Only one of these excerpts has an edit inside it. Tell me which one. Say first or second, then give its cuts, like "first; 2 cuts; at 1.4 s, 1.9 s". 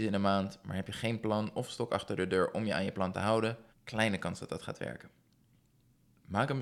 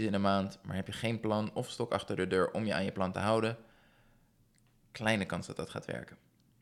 first; 1 cut; at 3.7 s